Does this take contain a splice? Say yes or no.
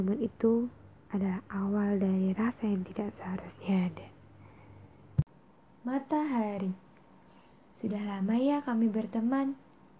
no